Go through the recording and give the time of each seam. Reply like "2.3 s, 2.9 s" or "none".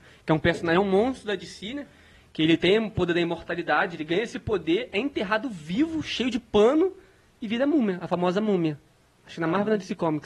none